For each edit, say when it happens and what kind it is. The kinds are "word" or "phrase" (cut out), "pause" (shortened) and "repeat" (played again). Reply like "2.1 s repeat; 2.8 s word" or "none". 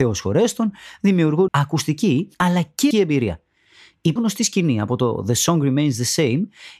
1.5 s phrase; 2.3 s pause; 2.9 s word; 4.2 s word